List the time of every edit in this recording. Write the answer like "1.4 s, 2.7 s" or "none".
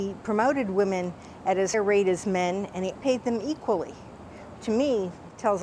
1.7 s, 2.9 s, 4.6 s